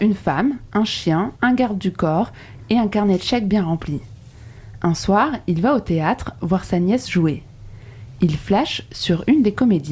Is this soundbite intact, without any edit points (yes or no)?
no